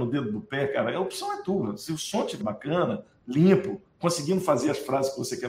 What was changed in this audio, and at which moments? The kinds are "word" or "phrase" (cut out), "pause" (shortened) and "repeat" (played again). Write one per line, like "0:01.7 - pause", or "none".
0:02.4 - word